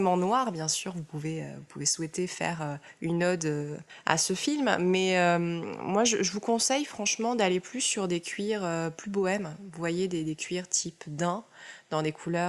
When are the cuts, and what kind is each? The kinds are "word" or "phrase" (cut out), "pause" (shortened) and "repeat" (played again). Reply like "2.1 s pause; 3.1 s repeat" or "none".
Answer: none

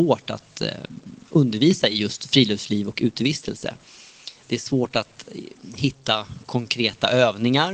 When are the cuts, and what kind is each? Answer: none

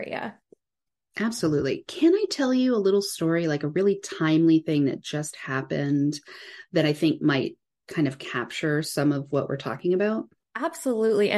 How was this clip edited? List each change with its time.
none

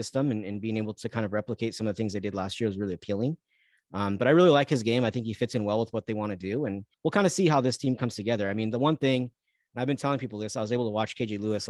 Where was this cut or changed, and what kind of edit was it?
6.9 s pause

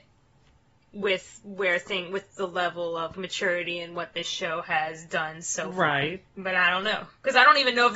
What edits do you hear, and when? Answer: 3.1 s word

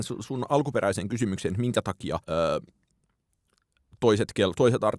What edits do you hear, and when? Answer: 2.2 s pause

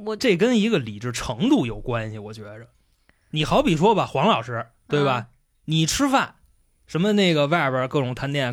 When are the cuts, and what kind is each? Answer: none

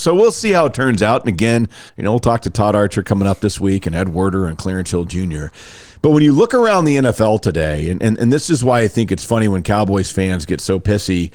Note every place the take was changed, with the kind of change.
1.9 s pause

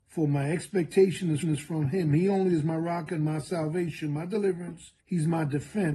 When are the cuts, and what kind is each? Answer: 1.4 s repeat; 5.0 s pause

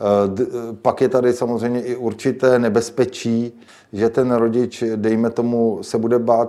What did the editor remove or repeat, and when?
3.7 s pause

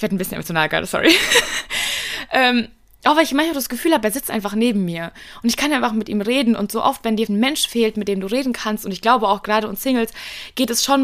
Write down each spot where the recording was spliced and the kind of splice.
7.3 s word

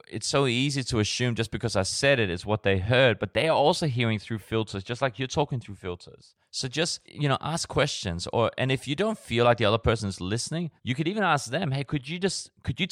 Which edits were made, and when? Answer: 6.4 s pause; 7.1 s pause; 10.8 s pause

